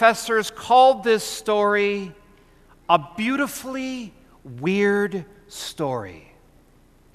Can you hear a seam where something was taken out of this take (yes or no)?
no